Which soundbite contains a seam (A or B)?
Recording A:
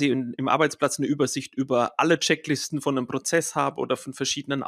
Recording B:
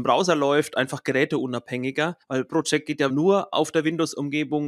B